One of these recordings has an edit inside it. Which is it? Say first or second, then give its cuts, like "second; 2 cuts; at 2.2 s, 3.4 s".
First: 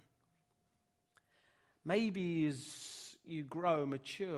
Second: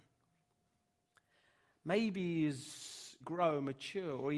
second; 1 cut; at 3.2 s